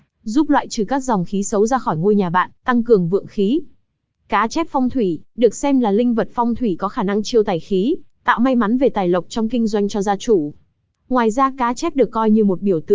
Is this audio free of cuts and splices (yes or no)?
yes